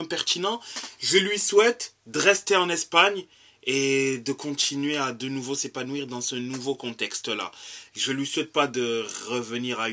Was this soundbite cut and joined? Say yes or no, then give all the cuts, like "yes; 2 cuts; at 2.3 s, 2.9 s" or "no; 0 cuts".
no; 0 cuts